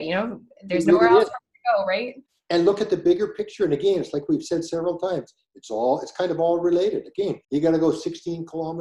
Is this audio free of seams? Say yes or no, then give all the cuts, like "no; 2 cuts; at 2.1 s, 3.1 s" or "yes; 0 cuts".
no; 2 cuts; at 2.3 s, 7.4 s